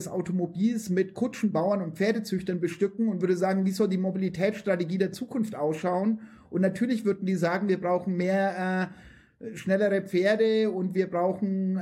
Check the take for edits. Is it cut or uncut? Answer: uncut